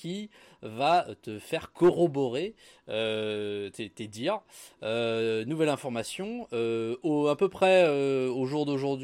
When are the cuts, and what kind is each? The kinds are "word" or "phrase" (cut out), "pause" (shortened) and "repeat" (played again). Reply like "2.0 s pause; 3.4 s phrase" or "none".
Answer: none